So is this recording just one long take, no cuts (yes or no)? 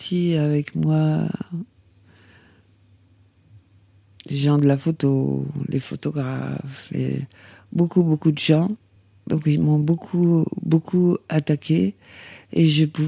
no